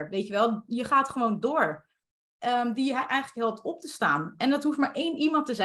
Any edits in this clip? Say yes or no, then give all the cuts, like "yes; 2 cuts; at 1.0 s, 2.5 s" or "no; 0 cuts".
no; 0 cuts